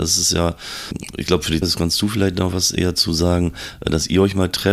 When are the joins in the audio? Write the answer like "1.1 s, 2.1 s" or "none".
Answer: 1.6 s